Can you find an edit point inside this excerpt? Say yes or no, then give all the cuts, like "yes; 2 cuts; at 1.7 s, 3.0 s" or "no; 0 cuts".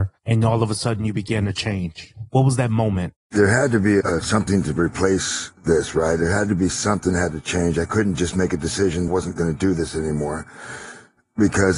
yes; 3 cuts; at 4.0 s, 5.6 s, 9.1 s